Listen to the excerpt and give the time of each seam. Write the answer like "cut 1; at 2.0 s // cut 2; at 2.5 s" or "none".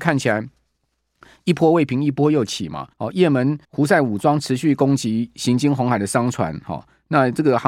cut 1; at 2.9 s // cut 2; at 3.6 s